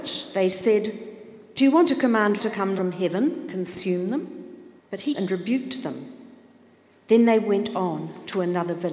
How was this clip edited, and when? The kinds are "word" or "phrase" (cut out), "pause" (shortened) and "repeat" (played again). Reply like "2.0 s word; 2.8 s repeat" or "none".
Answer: 1.5 s word; 1.9 s word; 2.4 s word; 2.8 s word; 3.5 s word; 4.8 s pause; 5.1 s word